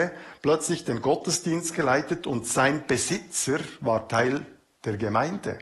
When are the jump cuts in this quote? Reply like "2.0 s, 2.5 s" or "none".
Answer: none

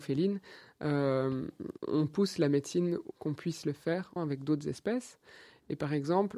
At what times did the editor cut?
1.8 s, 3.1 s, 4.2 s

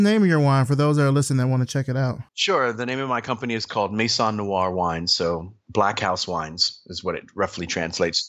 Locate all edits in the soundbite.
2.3 s

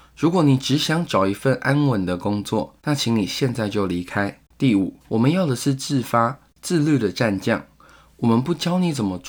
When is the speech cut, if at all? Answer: 2.8 s, 4.5 s, 5.0 s

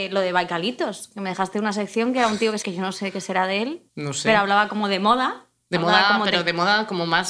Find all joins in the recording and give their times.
2.6 s, 3.9 s

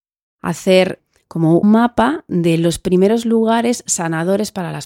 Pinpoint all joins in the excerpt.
1.6 s

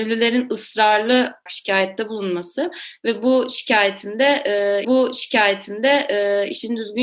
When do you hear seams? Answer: 1.5 s, 4.8 s

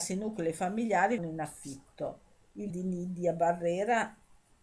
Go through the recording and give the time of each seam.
1.2 s, 2.7 s

